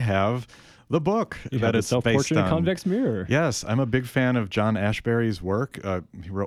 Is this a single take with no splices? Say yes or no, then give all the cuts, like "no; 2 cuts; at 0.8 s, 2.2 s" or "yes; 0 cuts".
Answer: yes; 0 cuts